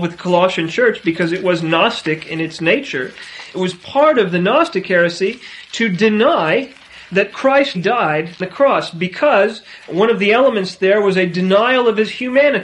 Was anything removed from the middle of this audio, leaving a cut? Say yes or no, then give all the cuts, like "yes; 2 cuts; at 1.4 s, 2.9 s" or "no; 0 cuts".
yes; 2 cuts; at 7.7 s, 8.4 s